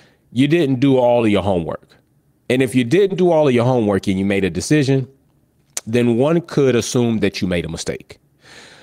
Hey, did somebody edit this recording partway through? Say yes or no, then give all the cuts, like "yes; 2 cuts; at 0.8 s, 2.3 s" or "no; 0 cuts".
no; 0 cuts